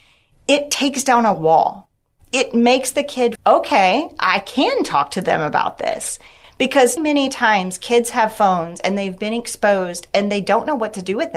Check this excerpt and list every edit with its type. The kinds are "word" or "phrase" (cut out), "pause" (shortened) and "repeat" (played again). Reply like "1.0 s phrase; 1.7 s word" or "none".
3.4 s phrase; 7.0 s word